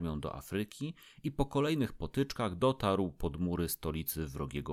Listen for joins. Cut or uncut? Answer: uncut